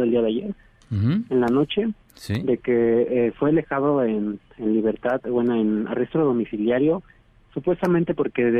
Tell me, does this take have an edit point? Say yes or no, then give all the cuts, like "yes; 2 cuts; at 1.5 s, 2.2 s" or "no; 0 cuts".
no; 0 cuts